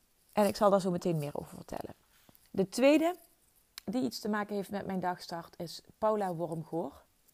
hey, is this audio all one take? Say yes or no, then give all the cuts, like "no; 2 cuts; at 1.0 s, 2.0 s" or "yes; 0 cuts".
yes; 0 cuts